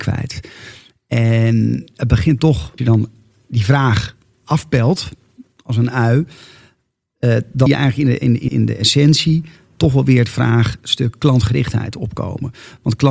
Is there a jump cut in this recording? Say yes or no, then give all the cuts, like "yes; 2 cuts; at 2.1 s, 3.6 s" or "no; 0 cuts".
yes; 3 cuts; at 2.8 s, 7.7 s, 8.5 s